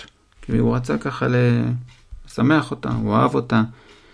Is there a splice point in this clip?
no; 0 cuts

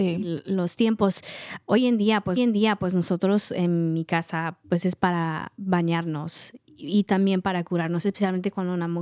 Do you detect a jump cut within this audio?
yes; 2 cuts; at 2.4 s, 4.6 s

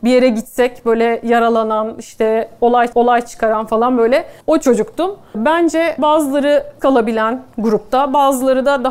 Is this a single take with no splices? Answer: no; 4 cuts; at 2.9 s, 4.4 s, 6.0 s, 6.8 s

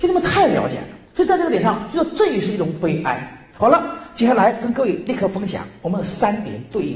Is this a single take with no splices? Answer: no; 2 cuts; at 1.0 s, 3.5 s

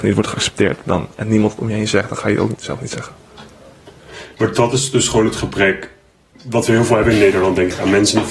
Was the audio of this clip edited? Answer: no; 0 cuts

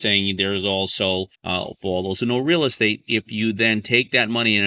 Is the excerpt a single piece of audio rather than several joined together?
no; 1 cut; at 1.4 s

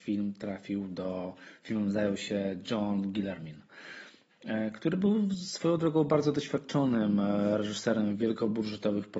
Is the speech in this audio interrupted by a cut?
no; 0 cuts

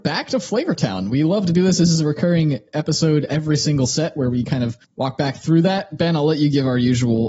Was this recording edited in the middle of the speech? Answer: no; 0 cuts

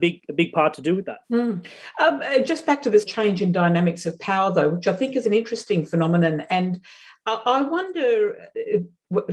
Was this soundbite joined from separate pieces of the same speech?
yes; 3 cuts; at 1.2 s, 3.1 s, 5.2 s

